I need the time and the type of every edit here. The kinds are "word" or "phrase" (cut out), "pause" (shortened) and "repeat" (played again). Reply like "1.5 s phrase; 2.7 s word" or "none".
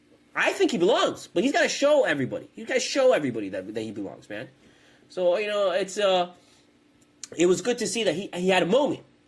none

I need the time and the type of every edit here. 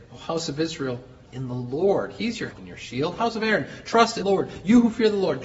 1.3 s word; 2.5 s word; 4.2 s word

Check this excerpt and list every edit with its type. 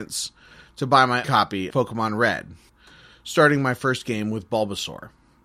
1.2 s word; 1.7 s word; 2.7 s pause

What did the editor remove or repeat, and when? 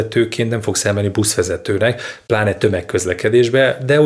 none

